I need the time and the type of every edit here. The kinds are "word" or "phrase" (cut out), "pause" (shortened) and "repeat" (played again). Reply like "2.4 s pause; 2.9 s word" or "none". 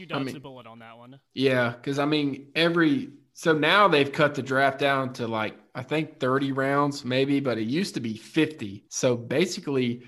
1.3 s pause; 8.9 s pause